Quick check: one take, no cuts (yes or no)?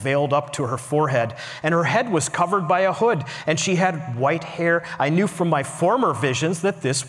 yes